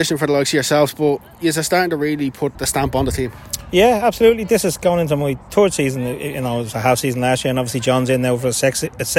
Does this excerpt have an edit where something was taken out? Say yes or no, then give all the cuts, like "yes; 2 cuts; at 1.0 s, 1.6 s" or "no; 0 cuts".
yes; 1 cut; at 2.5 s